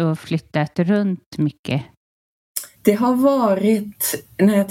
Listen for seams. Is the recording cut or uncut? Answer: cut